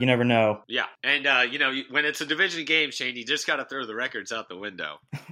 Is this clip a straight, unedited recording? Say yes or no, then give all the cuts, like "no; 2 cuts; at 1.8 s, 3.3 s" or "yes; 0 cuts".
yes; 0 cuts